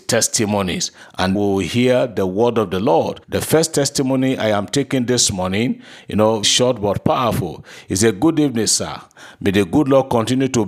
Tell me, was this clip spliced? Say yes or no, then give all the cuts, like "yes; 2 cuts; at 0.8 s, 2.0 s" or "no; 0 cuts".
yes; 3 cuts; at 1.3 s, 3.2 s, 6.4 s